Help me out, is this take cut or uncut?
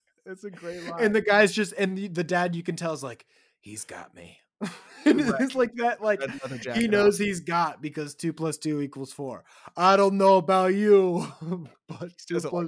uncut